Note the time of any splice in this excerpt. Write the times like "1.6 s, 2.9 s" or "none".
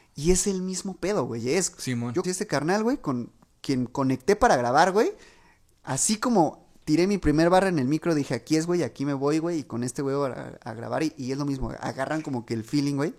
2.2 s